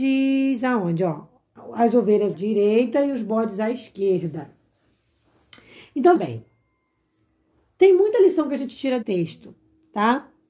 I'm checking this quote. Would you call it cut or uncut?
cut